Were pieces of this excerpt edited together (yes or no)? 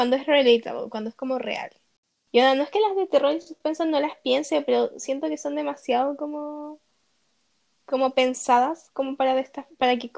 no